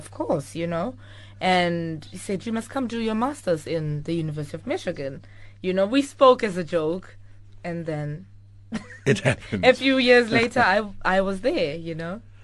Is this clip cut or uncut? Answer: uncut